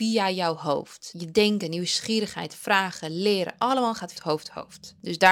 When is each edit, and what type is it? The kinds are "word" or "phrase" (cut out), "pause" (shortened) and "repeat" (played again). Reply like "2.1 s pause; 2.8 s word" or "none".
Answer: 4.1 s phrase